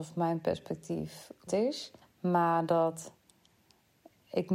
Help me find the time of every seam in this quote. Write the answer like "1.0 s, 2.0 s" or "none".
1.5 s, 2.0 s